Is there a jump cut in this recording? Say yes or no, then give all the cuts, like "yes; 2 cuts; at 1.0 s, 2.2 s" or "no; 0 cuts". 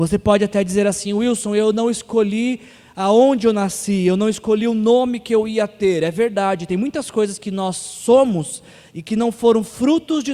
no; 0 cuts